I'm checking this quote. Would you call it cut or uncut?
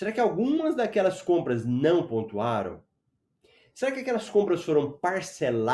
uncut